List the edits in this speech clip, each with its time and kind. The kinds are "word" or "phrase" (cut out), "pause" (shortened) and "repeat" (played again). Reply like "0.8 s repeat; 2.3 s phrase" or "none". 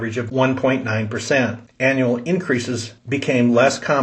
3.0 s pause